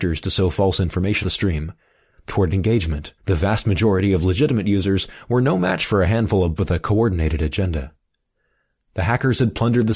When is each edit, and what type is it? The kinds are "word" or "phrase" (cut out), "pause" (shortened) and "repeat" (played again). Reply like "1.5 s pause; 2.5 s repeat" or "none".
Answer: 1.2 s word; 2.3 s phrase; 3.2 s pause; 6.6 s word